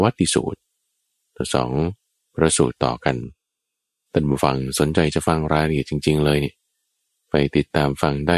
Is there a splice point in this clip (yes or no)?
no